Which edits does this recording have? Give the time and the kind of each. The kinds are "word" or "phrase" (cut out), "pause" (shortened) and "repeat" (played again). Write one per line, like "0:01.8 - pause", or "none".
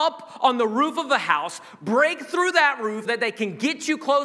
0:03.0 - word